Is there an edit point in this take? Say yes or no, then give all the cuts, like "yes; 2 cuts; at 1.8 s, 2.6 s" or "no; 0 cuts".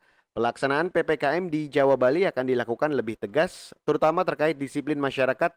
no; 0 cuts